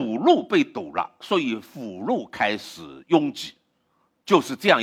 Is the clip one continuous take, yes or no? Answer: yes